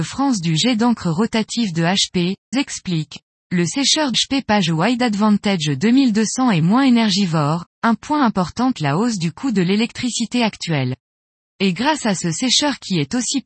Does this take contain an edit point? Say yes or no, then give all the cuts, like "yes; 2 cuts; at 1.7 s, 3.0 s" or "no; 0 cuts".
yes; 4 cuts; at 2.5 s, 4.1 s, 7.7 s, 8.7 s